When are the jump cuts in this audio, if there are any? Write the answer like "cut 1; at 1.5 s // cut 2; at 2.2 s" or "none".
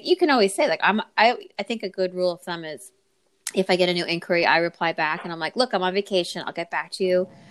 none